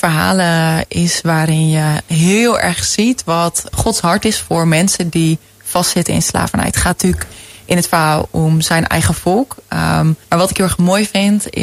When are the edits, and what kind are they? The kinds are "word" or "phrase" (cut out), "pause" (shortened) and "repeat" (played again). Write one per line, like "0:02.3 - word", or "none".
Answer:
0:03.7 - word
0:10.2 - pause